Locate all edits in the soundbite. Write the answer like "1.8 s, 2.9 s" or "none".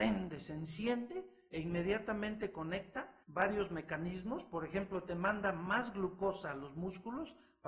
3.2 s